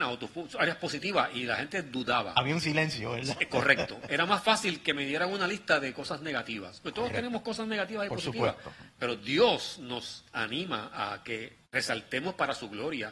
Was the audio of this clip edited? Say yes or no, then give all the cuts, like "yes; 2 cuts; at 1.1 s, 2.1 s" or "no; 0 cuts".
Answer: yes; 1 cut; at 11.6 s